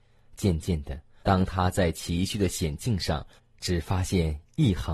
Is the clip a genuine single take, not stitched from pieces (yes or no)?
no